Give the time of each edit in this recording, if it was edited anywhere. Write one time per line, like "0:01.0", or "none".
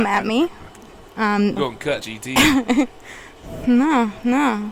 0:01.1
0:01.6
0:02.0